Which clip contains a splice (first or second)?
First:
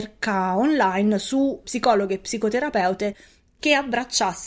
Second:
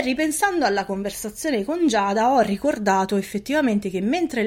first